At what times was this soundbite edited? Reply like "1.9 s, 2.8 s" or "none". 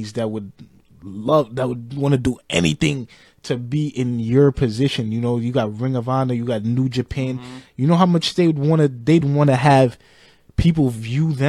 none

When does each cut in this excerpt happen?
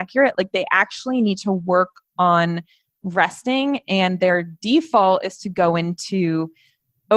none

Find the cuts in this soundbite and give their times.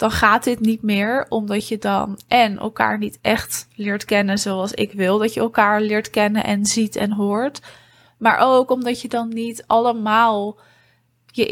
none

